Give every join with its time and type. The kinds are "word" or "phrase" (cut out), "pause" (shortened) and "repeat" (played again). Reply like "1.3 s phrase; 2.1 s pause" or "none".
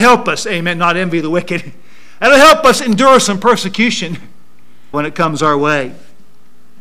4.9 s word